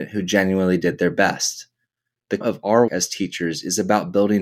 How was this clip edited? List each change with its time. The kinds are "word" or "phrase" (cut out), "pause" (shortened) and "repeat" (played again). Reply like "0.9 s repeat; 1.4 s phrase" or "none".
2.4 s word; 2.9 s word

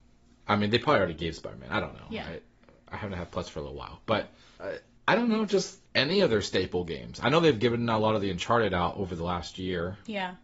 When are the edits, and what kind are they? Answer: none

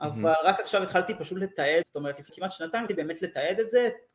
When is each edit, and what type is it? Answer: 1.8 s phrase; 2.3 s word; 2.9 s word

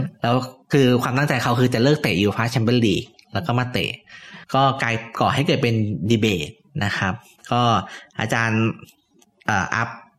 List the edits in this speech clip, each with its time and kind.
4.4 s pause

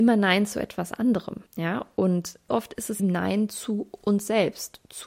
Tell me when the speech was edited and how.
1.5 s pause; 2.5 s word; 3.0 s word

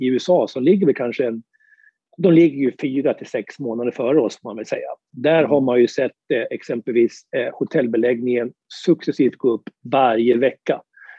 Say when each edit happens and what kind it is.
none

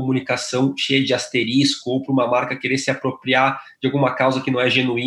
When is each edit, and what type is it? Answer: none

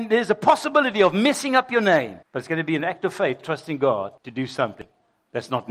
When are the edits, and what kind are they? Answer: 2.2 s pause; 4.2 s pause

